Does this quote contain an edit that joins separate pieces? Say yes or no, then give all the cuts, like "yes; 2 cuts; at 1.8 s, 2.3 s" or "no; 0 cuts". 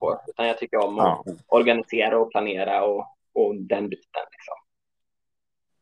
no; 0 cuts